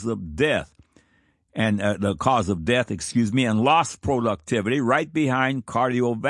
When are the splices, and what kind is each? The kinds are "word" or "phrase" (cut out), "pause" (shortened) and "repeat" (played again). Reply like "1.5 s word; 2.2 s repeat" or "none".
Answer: none